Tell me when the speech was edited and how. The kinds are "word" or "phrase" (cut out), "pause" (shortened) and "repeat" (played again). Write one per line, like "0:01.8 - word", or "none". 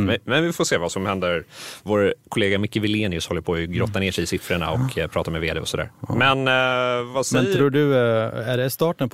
none

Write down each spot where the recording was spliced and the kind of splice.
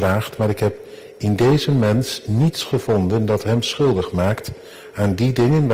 none

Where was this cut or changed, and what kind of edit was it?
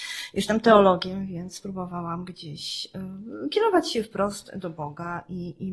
none

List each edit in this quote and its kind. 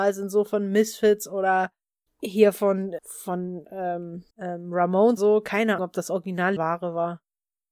0:02.1 - pause
0:03.0 - word
0:04.3 - pause
0:05.2 - word
0:05.8 - word
0:06.6 - word

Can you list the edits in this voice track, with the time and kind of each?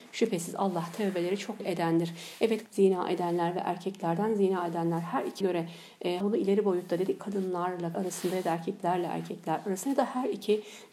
0:01.6 - word
0:02.7 - word
0:05.4 - word
0:06.2 - word
0:07.2 - word
0:07.9 - word

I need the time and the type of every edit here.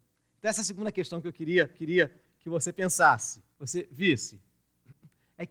0:01.7 - repeat
0:03.5 - pause

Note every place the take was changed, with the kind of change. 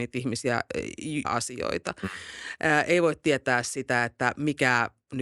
0:01.2 - phrase

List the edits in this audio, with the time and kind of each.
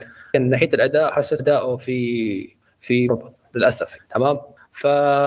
0:01.4 - word
0:03.1 - word
0:04.0 - word

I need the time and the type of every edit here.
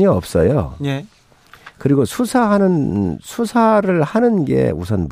none

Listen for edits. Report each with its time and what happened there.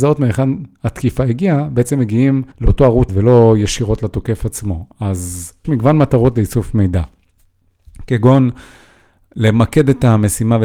0:02.5 - pause
0:03.1 - word
0:05.6 - phrase

